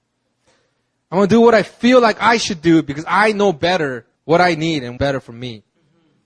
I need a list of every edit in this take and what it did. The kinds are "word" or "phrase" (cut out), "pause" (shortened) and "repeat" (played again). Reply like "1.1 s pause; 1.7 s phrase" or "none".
4.2 s pause; 5.0 s word